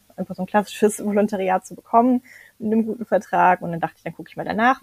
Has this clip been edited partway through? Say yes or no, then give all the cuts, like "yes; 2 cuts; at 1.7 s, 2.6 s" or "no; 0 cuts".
no; 0 cuts